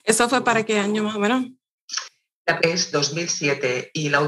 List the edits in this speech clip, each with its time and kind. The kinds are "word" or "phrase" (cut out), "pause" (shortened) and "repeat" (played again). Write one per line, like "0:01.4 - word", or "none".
0:02.6 - phrase
0:02.9 - word

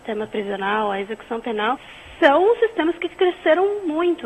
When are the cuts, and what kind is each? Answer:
none

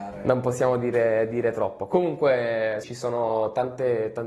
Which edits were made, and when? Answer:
0:02.8 - word

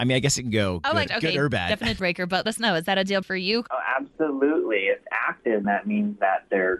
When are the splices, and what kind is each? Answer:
0:01.1 - word
0:02.0 - word
0:02.5 - word
0:03.2 - word
0:05.0 - word
0:05.6 - word

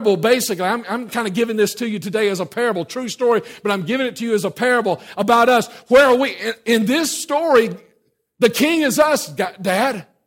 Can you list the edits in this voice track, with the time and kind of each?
none

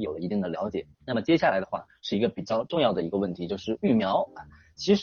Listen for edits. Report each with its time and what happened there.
0:00.9 - pause

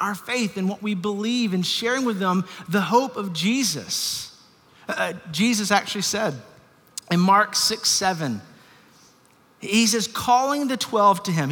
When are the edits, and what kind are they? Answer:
none

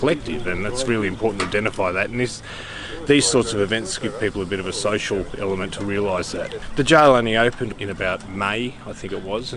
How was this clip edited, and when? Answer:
none

